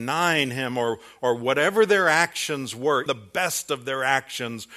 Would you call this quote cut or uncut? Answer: cut